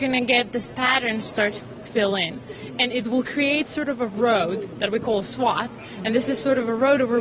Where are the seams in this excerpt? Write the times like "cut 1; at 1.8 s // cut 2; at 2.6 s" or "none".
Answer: cut 1; at 1.8 s